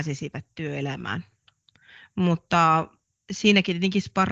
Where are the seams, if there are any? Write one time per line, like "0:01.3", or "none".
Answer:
none